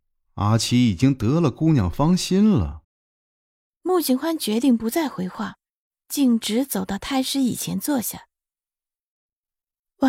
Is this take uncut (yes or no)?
no